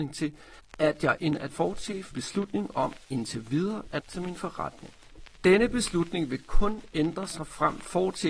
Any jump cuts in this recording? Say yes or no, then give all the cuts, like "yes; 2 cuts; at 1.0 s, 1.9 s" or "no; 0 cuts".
yes; 4 cuts; at 1.2 s, 1.5 s, 2.1 s, 4.0 s